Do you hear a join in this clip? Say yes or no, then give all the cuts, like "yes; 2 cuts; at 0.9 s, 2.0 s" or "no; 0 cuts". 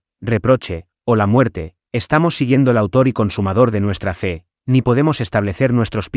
no; 0 cuts